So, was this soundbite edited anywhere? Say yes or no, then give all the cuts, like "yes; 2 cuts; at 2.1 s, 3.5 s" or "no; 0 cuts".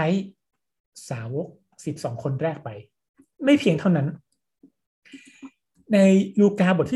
no; 0 cuts